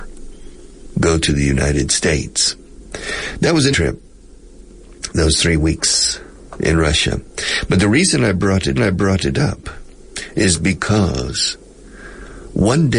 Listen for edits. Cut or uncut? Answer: cut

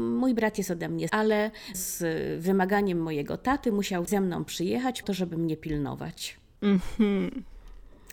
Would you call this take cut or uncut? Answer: cut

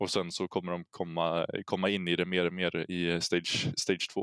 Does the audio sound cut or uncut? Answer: uncut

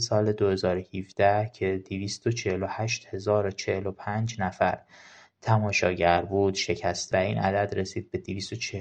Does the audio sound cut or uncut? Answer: cut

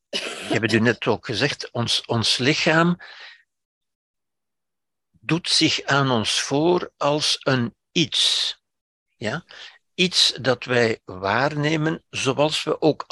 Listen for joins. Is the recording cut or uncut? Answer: uncut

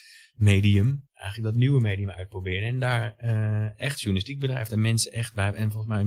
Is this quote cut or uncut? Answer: uncut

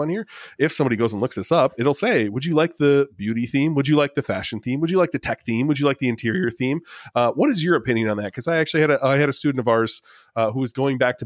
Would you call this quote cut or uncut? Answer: uncut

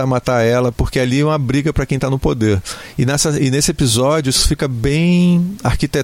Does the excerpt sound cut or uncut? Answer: uncut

